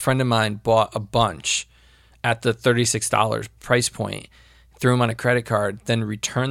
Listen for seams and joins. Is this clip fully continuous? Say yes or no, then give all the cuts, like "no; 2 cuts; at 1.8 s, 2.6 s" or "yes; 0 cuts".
yes; 0 cuts